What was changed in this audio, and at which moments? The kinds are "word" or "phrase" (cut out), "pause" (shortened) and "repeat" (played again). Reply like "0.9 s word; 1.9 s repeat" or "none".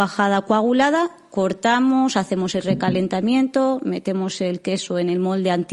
none

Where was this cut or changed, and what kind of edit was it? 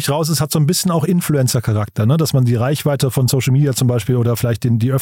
none

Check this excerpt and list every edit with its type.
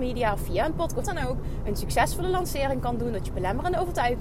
1.0 s word

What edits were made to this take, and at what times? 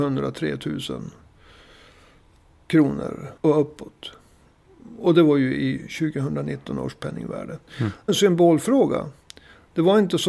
3.4 s pause; 7.7 s pause; 8.1 s phrase

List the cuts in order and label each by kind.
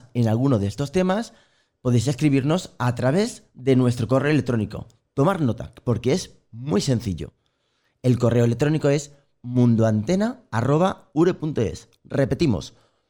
none

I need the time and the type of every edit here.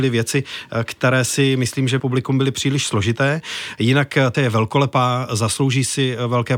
2.0 s phrase; 4.3 s word

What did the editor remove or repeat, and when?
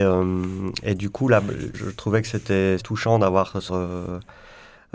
1.7 s word; 2.8 s word; 3.7 s word

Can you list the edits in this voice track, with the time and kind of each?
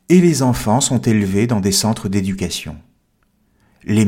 none

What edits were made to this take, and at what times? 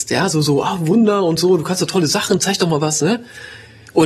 none

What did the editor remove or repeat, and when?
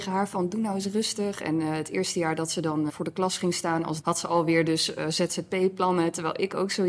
2.9 s word; 4.0 s word

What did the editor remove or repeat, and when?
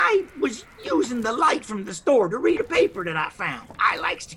none

